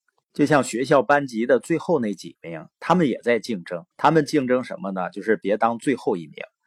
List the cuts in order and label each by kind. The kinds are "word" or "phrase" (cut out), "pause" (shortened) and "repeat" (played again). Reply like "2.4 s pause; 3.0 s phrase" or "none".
3.9 s pause